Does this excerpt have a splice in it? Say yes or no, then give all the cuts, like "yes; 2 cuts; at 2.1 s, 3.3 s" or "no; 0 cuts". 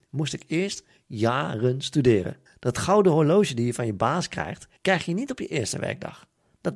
yes; 2 cuts; at 2.5 s, 4.8 s